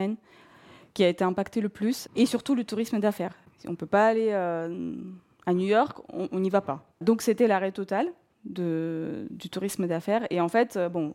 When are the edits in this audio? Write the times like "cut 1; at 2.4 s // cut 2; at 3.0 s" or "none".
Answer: cut 1; at 6.9 s

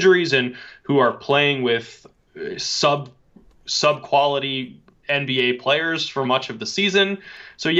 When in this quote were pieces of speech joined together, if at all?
none

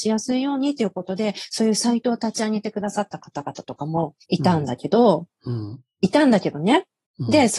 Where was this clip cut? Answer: cut 1; at 4.2 s

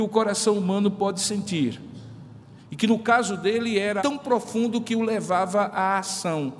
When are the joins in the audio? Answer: cut 1; at 4.0 s

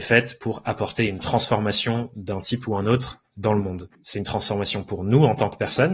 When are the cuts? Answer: cut 1; at 3.9 s

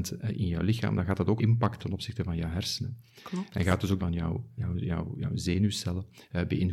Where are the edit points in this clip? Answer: cut 1; at 1.4 s // cut 2; at 1.8 s // cut 3; at 4.0 s // cut 4; at 4.6 s

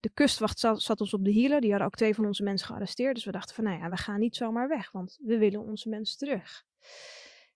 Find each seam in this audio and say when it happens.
none

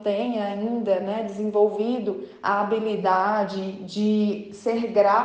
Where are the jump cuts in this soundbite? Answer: none

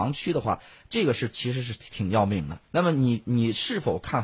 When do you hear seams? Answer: cut 1; at 2.6 s

